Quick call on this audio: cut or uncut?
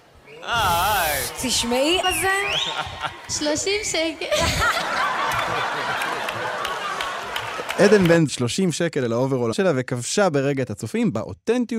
cut